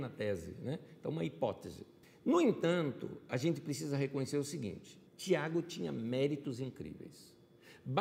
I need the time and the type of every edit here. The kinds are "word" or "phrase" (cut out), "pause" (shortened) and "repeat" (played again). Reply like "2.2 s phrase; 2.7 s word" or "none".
2.0 s pause; 5.1 s pause